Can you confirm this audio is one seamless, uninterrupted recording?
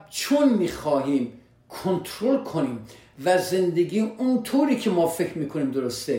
yes; 0 cuts

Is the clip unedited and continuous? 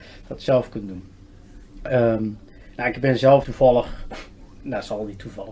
no; 1 cut; at 3.4 s

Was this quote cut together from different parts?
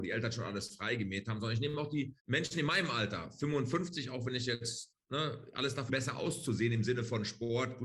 yes; 2 cuts; at 2.2 s, 5.9 s

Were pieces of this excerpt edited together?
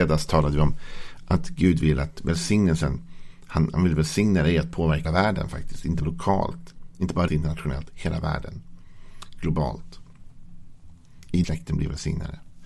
yes; 4 cuts; at 5.0 s, 6.0 s, 7.3 s, 11.4 s

